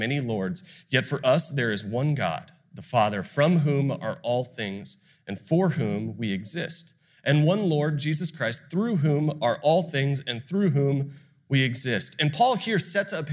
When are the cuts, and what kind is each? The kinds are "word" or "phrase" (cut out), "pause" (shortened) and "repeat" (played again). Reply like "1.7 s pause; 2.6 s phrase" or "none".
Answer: none

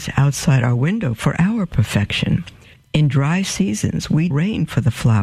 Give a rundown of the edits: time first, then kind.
2.7 s pause; 4.3 s word

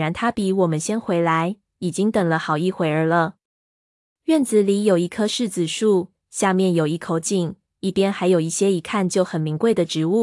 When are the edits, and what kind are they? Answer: none

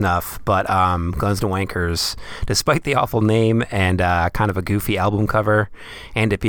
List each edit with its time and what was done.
none

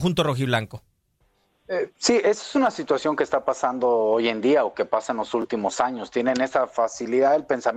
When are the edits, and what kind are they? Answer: none

